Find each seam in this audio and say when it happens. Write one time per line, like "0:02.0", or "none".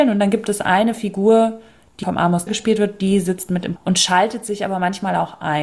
0:02.0
0:02.5
0:03.8